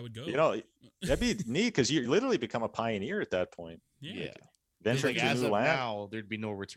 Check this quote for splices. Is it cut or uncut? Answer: uncut